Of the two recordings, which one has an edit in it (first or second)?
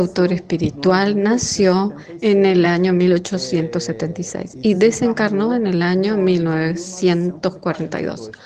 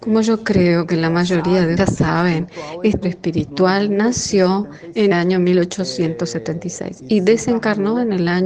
second